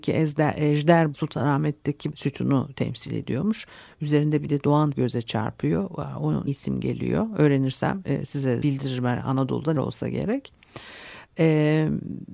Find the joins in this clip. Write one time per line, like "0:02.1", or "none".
0:01.1
0:02.1
0:04.9
0:06.5
0:08.6
0:09.8

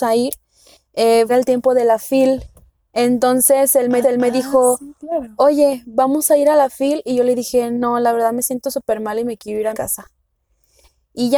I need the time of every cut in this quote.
0:01.3
0:04.0
0:09.7

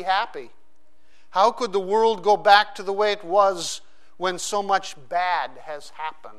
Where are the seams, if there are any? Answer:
none

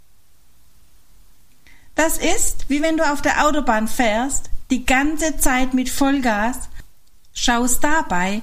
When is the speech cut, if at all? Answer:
none

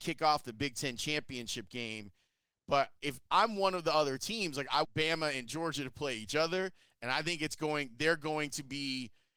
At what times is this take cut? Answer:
0:04.8

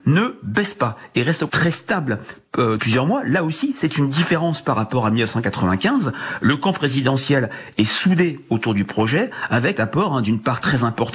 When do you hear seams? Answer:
0:01.5
0:02.8
0:09.7

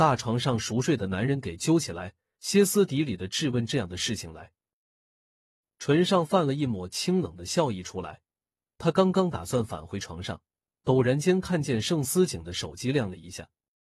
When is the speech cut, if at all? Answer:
none

